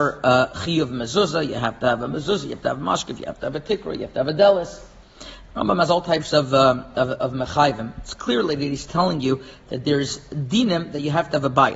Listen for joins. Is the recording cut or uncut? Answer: uncut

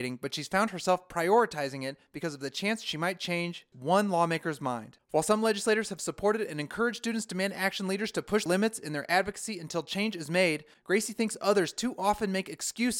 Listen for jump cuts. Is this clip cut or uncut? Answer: cut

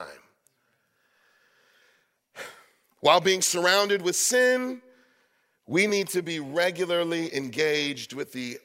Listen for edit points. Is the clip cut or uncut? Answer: uncut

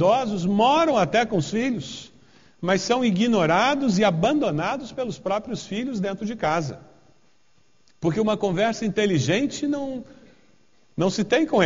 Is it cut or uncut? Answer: uncut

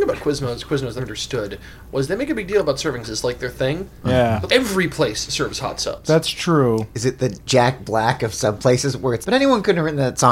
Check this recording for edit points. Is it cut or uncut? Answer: cut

